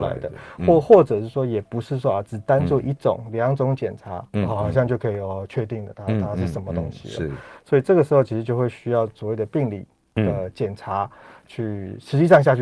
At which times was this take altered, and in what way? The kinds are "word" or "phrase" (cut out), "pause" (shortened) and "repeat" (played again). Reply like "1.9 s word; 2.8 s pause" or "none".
none